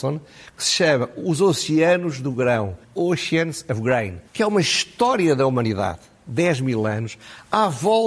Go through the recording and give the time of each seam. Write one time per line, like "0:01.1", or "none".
0:02.8
0:04.3